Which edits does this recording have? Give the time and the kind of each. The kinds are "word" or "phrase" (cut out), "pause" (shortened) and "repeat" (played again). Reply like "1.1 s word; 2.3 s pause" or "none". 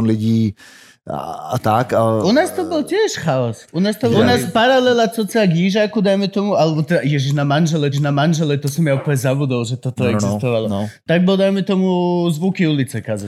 4.1 s phrase; 7.9 s repeat